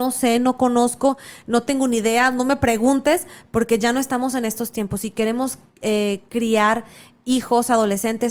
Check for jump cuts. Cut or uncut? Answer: uncut